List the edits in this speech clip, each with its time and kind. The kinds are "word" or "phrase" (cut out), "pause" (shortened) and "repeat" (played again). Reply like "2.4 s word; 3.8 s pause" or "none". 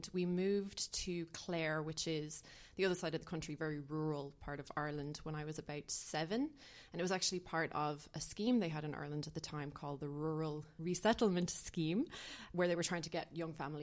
none